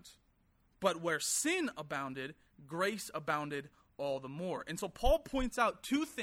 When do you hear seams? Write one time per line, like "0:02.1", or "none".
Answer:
none

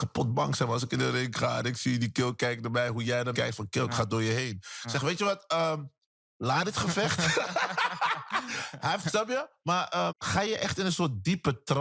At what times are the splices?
0:03.3
0:09.0
0:10.1

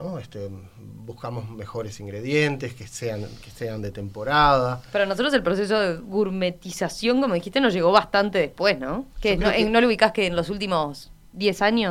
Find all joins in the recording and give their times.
0:09.1

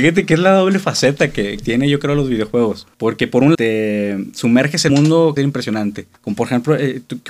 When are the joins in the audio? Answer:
0:01.6
0:02.9
0:03.5
0:04.9
0:05.4
0:06.2

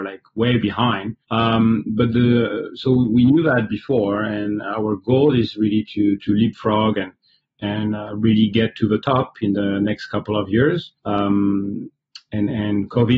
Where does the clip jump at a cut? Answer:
0:01.2
0:02.1
0:11.0

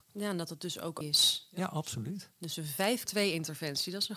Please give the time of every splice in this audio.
0:01.0
0:03.1

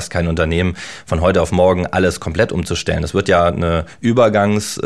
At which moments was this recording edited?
none

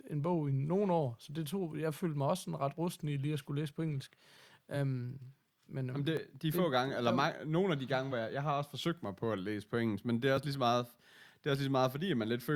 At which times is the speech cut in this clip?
none

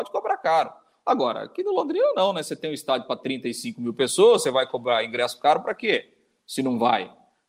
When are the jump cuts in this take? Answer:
none

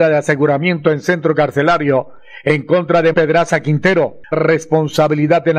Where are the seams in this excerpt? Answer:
0:03.1
0:04.3

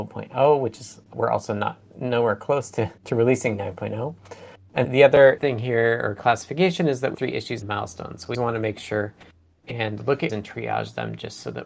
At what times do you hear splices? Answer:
0:01.1
0:03.0
0:04.8
0:05.4
0:07.1
0:07.6
0:08.3
0:10.3

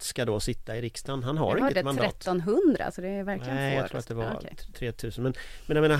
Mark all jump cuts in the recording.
none

